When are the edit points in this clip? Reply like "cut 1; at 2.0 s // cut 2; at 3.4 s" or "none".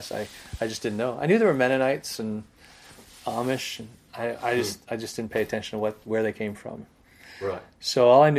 none